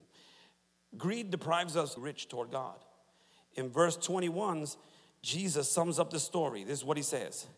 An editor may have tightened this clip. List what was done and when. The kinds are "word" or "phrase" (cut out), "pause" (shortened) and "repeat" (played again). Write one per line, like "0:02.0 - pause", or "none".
0:02.0 - phrase